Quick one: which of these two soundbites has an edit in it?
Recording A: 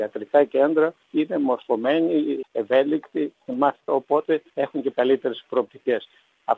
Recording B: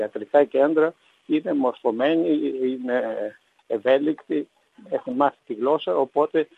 A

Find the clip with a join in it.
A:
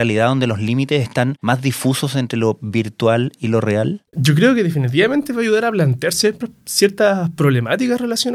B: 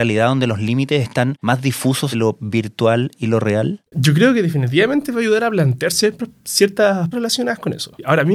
B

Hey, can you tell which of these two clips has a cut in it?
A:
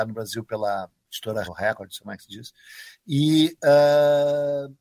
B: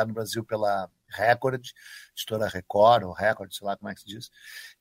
A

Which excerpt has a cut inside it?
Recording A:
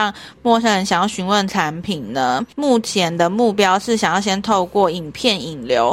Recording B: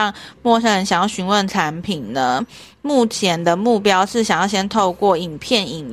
A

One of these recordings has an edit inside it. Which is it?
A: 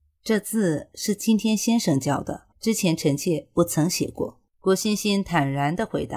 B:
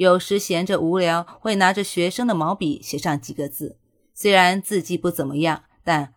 A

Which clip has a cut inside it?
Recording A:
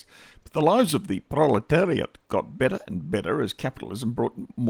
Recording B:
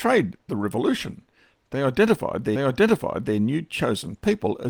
B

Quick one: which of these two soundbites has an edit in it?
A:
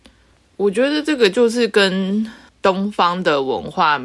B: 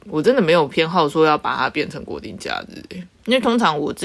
B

